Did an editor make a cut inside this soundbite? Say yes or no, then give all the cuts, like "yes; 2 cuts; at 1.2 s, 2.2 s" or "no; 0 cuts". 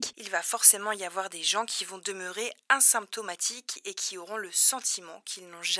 no; 0 cuts